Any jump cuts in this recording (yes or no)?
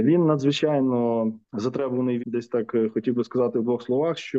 yes